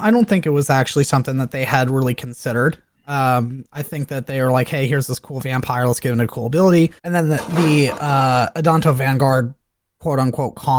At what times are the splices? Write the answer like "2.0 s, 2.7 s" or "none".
7.0 s